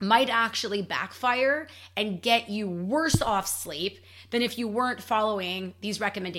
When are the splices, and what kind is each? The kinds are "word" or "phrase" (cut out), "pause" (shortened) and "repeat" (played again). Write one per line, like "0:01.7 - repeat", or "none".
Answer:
none